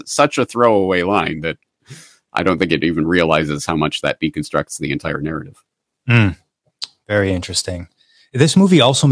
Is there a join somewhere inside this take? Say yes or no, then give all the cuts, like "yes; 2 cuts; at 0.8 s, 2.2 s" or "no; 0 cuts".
no; 0 cuts